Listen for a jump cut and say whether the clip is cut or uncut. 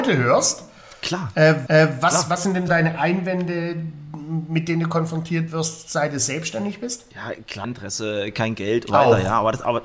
cut